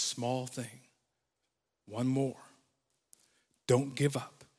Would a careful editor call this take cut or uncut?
uncut